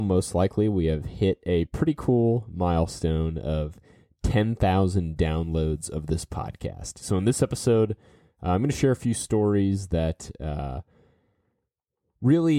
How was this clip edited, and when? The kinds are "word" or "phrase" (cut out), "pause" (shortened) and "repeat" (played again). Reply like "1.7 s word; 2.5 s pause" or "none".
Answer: none